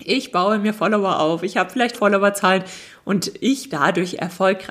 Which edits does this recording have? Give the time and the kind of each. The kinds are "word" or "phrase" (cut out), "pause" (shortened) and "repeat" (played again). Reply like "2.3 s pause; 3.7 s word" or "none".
1.9 s word; 3.7 s word